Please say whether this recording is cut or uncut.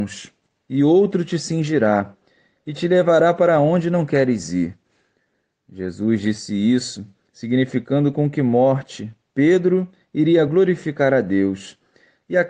uncut